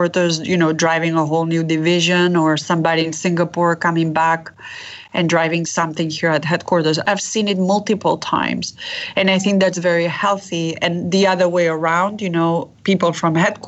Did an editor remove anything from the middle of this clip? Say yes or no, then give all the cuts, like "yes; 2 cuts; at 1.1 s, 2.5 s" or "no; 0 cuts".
no; 0 cuts